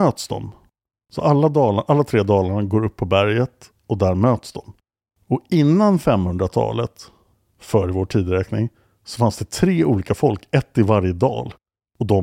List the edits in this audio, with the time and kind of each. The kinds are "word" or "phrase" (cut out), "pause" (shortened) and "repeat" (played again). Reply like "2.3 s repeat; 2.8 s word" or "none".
none